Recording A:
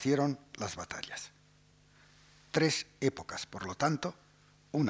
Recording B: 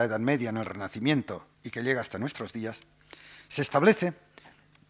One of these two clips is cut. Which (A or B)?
B